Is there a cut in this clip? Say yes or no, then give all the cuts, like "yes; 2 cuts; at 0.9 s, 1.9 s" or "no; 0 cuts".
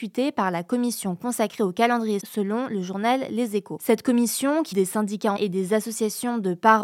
yes; 3 cuts; at 2.2 s, 4.7 s, 5.4 s